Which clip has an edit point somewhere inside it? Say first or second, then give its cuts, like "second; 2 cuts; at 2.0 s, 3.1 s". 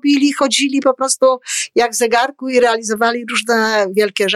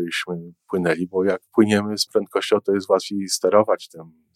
second; 2 cuts; at 1.5 s, 2.1 s